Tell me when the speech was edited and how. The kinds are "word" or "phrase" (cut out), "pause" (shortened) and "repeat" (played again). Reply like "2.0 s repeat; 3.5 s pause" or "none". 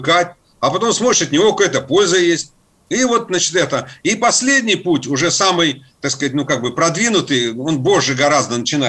none